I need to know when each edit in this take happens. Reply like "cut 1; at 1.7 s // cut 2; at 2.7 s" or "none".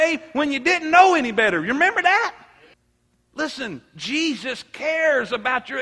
cut 1; at 2.7 s